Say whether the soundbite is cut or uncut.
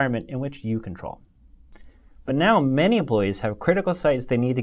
uncut